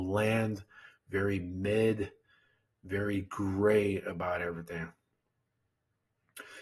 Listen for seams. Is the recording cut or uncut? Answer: uncut